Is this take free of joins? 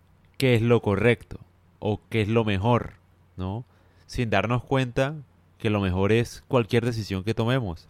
yes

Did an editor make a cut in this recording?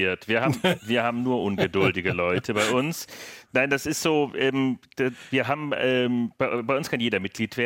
no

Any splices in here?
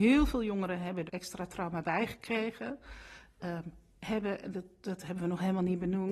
yes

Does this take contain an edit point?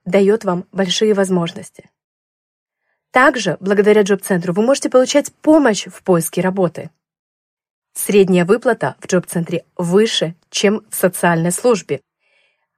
no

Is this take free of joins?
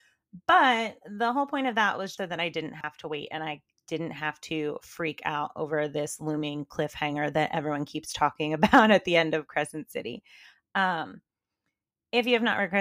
no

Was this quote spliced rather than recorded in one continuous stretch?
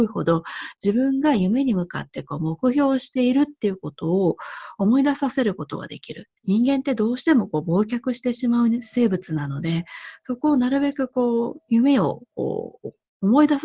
yes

